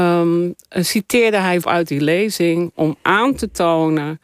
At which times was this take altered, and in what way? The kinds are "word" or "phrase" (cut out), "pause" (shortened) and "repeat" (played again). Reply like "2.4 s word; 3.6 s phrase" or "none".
1.6 s word